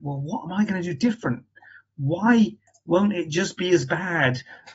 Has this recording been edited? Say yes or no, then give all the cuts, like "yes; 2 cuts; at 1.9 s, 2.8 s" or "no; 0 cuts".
no; 0 cuts